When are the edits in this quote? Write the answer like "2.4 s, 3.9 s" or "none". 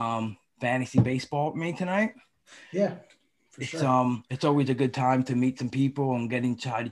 none